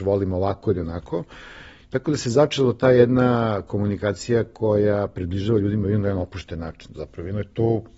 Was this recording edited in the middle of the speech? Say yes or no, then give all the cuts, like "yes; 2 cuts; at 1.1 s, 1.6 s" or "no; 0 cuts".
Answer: no; 0 cuts